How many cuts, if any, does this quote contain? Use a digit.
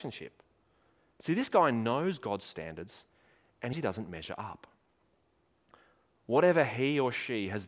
1